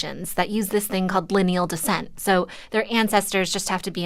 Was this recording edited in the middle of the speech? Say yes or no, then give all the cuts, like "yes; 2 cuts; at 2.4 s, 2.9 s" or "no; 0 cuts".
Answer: no; 0 cuts